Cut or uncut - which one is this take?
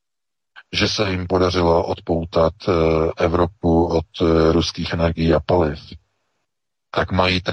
uncut